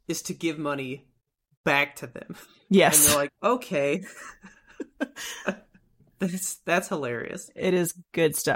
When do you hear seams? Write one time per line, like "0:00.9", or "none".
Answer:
0:03.3